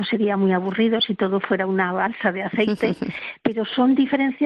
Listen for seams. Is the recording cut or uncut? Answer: uncut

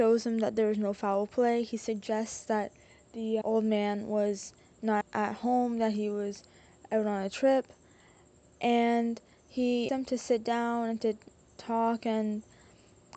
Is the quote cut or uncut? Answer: cut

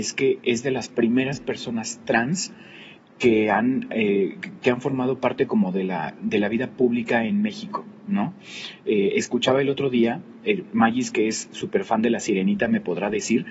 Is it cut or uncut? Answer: uncut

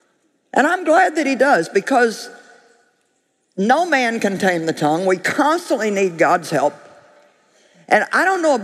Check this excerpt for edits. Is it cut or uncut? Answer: uncut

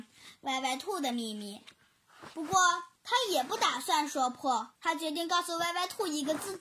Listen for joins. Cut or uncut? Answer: cut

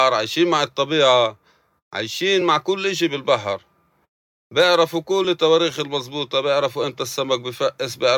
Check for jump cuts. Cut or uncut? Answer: uncut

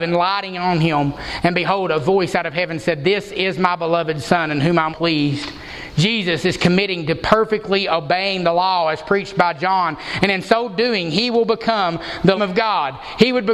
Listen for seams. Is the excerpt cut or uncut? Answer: cut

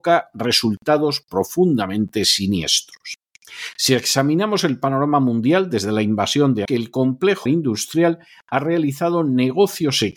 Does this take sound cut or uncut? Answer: cut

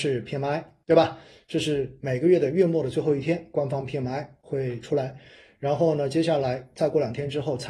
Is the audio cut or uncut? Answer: uncut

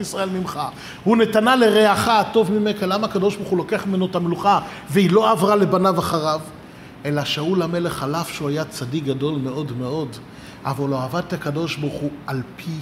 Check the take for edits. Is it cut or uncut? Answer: uncut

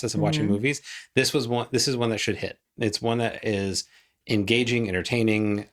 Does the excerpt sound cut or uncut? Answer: uncut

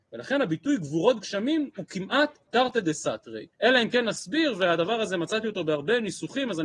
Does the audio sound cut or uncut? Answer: cut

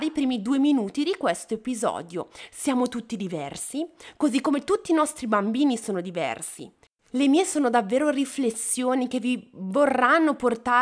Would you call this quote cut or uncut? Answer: uncut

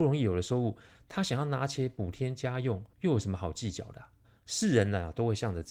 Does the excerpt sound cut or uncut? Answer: cut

